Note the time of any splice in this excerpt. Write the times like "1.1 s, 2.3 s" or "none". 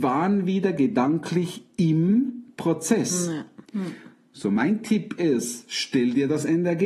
3.6 s